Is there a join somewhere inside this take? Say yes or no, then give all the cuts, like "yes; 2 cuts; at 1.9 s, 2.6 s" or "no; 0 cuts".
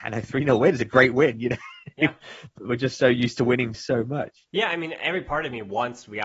yes; 2 cuts; at 3.7 s, 4.5 s